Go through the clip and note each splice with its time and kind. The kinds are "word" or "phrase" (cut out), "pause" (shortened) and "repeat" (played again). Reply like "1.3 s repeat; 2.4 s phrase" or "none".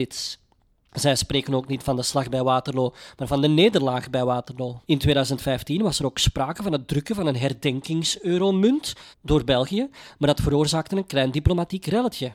4.8 s pause; 9.1 s pause